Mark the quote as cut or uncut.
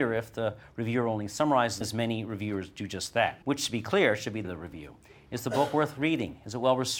cut